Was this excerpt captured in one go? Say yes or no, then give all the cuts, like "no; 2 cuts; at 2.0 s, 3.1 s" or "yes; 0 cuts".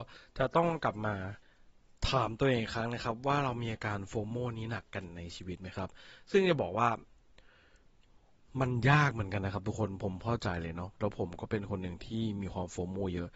yes; 0 cuts